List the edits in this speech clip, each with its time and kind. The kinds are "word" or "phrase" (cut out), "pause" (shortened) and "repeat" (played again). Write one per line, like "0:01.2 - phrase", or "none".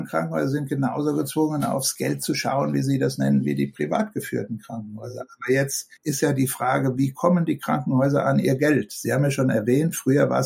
0:06.0 - pause